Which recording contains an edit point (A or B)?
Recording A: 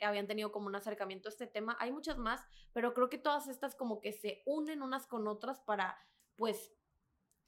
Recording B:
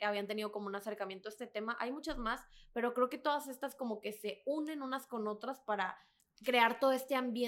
B